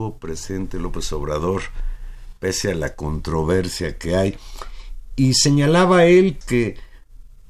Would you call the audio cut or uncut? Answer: cut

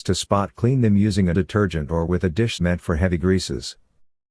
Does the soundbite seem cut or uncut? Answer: cut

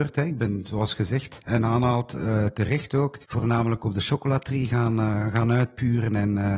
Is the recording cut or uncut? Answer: cut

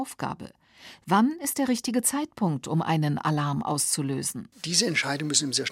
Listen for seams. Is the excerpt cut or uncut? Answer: uncut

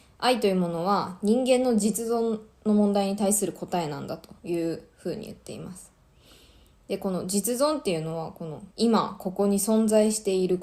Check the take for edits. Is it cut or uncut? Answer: cut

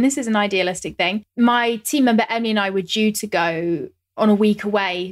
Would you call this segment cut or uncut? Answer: uncut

